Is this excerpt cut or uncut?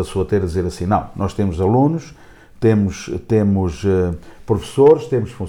uncut